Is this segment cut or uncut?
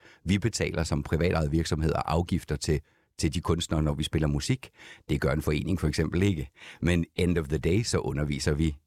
uncut